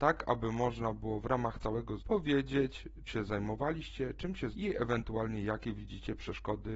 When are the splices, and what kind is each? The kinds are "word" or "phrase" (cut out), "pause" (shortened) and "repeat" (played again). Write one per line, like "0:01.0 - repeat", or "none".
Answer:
0:02.0 - word
0:03.1 - word
0:04.5 - word